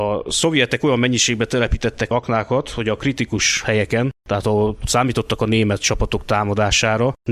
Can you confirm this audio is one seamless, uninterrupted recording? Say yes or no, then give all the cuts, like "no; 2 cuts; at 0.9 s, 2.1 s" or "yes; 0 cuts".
yes; 0 cuts